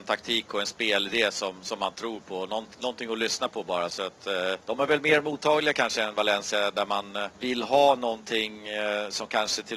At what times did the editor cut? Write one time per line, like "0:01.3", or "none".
0:04.6
0:07.3